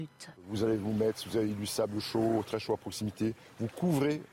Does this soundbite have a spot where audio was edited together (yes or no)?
no